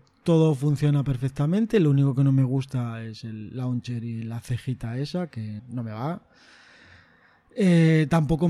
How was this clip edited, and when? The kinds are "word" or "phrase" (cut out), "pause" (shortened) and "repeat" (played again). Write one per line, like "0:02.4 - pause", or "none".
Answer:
0:05.6 - word